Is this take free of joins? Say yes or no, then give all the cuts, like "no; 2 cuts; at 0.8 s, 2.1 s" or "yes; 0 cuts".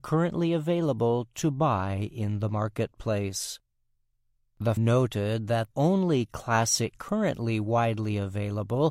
no; 3 cuts; at 4.8 s, 5.7 s, 6.9 s